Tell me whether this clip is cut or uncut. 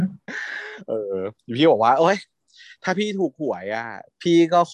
uncut